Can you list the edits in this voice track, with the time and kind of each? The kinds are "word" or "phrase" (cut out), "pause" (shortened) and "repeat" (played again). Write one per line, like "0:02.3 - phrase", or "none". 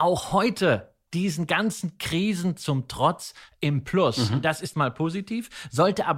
0:01.1 - word
0:04.7 - word